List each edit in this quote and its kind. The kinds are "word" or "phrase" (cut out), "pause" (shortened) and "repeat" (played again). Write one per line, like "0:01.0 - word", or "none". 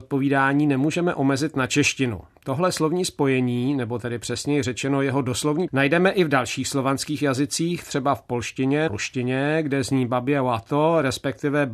0:05.7 - word
0:08.9 - word